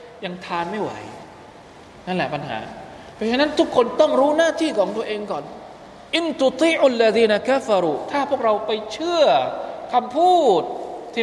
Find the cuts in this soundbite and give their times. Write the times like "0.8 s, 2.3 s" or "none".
6.1 s